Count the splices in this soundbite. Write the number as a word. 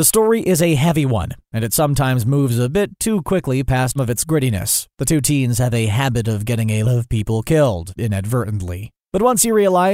three